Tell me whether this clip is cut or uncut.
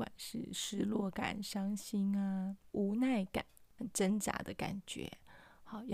uncut